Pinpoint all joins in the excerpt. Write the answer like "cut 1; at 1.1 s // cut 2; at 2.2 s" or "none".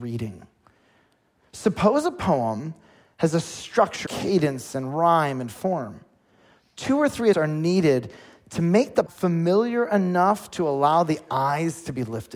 cut 1; at 4.1 s // cut 2; at 7.3 s // cut 3; at 9.1 s